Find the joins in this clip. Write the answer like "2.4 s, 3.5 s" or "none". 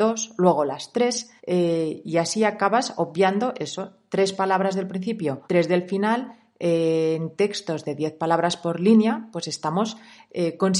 1.4 s, 5.5 s